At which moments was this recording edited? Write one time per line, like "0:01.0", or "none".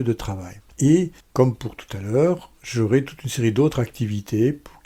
none